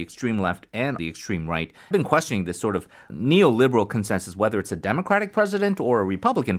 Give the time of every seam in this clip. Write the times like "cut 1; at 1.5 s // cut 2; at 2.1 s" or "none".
cut 1; at 1.0 s // cut 2; at 1.9 s // cut 3; at 3.1 s